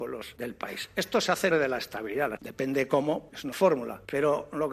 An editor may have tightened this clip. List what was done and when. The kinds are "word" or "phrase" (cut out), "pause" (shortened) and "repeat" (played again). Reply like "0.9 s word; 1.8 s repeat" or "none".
1.5 s word; 2.4 s word; 3.5 s word